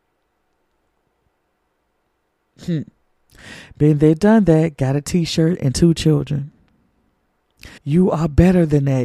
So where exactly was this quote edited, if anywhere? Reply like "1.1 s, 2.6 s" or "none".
7.8 s